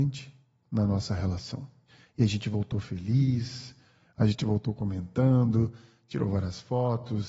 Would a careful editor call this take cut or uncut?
cut